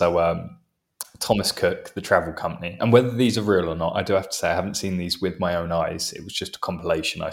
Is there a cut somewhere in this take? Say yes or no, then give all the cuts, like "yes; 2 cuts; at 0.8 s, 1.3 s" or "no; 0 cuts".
no; 0 cuts